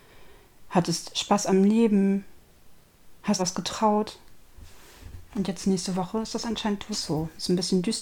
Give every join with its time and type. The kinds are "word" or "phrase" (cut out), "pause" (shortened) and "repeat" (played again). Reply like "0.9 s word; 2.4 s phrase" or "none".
3.4 s phrase; 6.9 s word